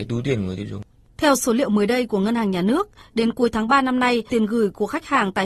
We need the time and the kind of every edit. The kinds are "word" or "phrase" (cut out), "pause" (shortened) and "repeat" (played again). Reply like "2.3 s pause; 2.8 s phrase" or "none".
4.3 s word